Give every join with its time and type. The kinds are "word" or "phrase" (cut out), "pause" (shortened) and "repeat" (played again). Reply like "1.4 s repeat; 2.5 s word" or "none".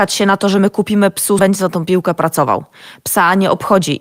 1.4 s phrase

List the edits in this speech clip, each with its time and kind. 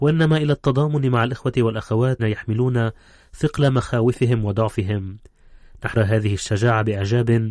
2.2 s word; 6.0 s word

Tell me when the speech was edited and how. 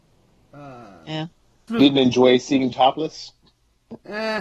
1.7 s word; 2.7 s word

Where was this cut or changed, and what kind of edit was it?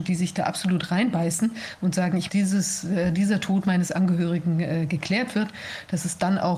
2.3 s phrase

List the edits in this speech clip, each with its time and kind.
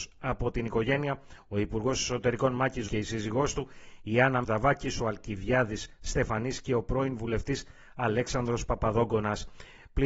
2.9 s word; 4.4 s phrase

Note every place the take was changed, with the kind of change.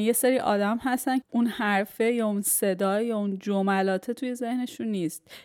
1.2 s word

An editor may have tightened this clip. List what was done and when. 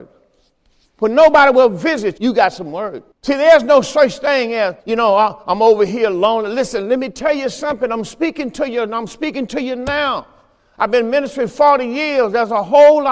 2.2 s word; 3.1 s pause; 4.8 s pause

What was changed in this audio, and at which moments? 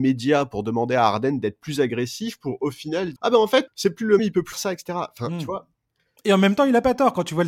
3.2 s word; 3.7 s word; 4.2 s word; 4.5 s word

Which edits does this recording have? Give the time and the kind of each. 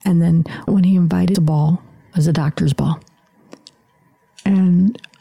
1.3 s phrase; 2.1 s word

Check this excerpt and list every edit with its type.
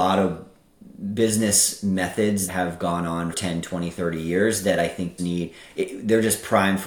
2.5 s word; 3.3 s word; 5.2 s word

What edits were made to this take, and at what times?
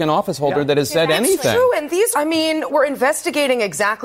2.1 s word; 2.7 s word

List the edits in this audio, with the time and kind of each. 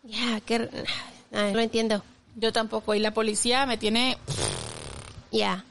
1.5 s word

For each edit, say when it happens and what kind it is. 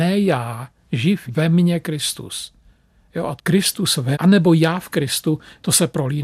1.3 s word; 3.4 s word; 4.1 s word

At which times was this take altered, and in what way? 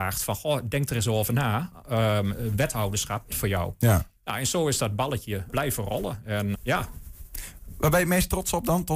3.3 s phrase; 4.2 s pause; 5.5 s word; 6.5 s word

